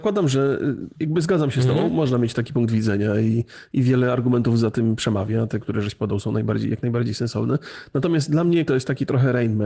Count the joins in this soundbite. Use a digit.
1